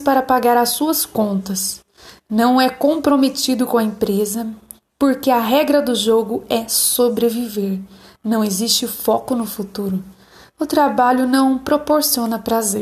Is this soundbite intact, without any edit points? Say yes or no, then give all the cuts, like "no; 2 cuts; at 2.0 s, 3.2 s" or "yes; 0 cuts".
yes; 0 cuts